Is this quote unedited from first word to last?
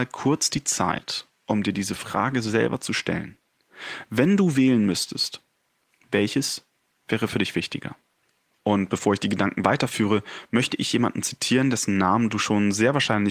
yes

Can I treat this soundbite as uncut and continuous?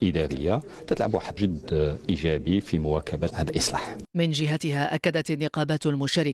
no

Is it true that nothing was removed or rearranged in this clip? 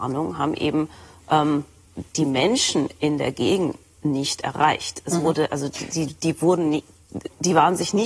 no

